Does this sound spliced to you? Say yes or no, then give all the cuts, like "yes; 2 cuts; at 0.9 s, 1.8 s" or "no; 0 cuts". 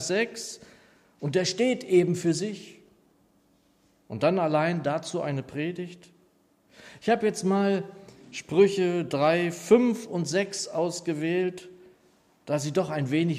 no; 0 cuts